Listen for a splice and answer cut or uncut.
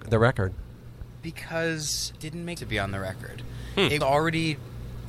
cut